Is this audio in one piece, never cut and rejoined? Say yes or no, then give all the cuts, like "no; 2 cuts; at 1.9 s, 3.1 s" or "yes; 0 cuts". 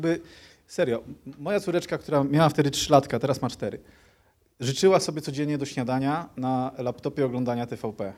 yes; 0 cuts